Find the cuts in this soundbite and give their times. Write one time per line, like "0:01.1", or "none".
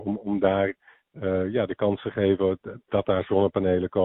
none